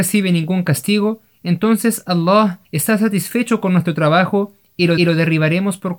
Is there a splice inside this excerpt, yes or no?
yes